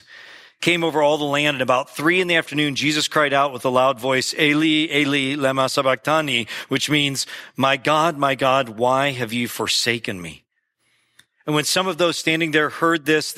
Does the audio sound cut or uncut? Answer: uncut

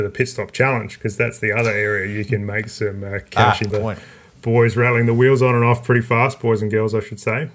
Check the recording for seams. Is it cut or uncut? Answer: cut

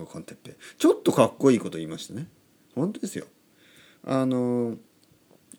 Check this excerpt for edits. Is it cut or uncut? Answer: uncut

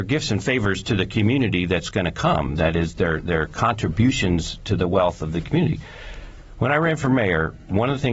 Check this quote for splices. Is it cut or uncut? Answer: uncut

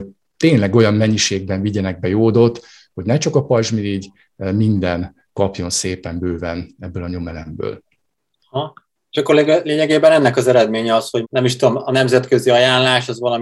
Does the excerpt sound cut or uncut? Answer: cut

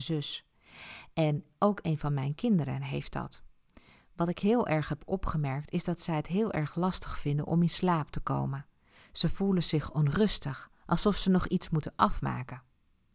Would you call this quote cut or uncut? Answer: uncut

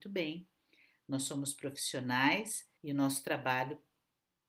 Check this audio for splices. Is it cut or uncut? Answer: cut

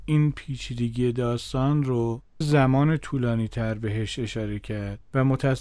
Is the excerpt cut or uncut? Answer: cut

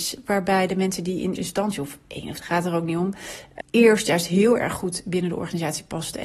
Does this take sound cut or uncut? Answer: cut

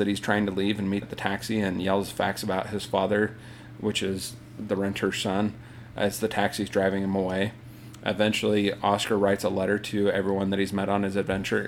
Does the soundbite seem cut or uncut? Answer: cut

